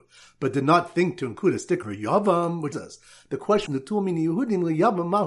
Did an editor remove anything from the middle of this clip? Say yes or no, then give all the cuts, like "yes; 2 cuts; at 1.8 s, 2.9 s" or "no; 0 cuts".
yes; 3 cuts; at 1.8 s, 2.7 s, 3.7 s